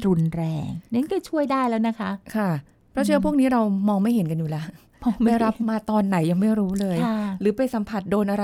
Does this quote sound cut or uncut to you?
uncut